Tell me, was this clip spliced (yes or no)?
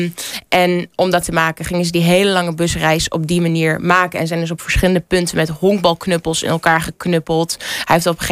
yes